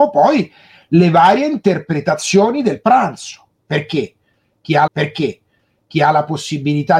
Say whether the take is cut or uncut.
cut